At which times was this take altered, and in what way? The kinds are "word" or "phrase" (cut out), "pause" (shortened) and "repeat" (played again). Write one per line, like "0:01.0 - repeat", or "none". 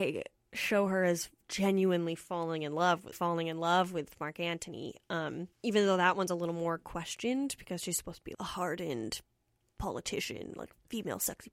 0:03.1 - phrase
0:05.5 - pause
0:08.3 - word